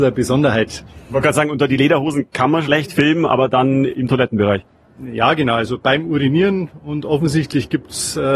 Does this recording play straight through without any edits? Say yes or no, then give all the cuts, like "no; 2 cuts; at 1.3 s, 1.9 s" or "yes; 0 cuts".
yes; 0 cuts